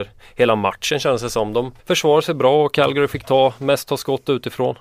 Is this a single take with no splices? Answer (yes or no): no